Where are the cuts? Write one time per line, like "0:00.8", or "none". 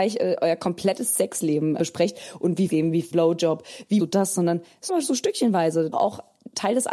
0:01.8
0:02.7
0:03.1
0:04.0
0:04.9
0:05.9